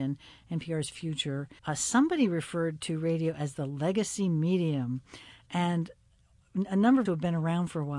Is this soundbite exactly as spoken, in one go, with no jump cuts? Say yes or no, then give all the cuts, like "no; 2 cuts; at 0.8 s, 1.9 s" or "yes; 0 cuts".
no; 2 cuts; at 1.6 s, 7.1 s